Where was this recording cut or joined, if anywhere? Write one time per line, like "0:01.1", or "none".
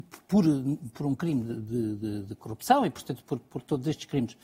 none